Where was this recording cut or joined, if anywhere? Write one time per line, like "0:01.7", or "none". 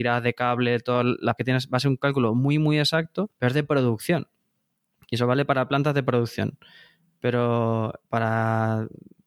0:01.4
0:03.3